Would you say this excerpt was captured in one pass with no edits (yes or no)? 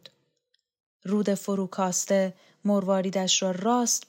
yes